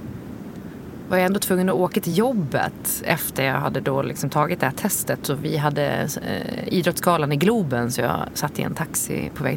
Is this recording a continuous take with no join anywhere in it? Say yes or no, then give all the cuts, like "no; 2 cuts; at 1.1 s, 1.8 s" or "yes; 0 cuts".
yes; 0 cuts